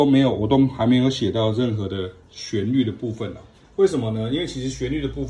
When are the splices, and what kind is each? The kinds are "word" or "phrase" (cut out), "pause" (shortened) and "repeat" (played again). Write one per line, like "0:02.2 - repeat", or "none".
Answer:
0:03.6 - pause